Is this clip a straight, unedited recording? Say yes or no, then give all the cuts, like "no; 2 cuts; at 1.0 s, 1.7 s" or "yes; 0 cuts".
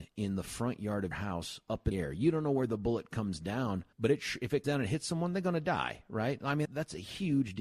no; 5 cuts; at 1.1 s, 1.9 s, 3.9 s, 4.6 s, 6.6 s